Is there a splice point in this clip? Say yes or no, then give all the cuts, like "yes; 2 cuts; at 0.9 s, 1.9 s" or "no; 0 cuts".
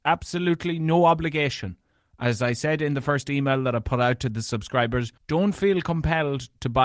yes; 1 cut; at 5.2 s